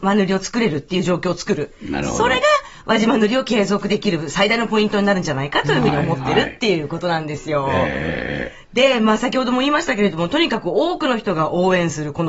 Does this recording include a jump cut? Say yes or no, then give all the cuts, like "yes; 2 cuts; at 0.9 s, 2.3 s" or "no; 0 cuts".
no; 0 cuts